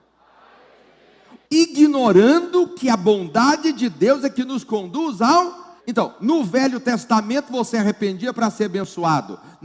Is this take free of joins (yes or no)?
no